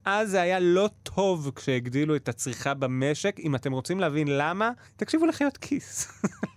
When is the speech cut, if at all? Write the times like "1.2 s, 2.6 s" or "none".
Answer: 4.9 s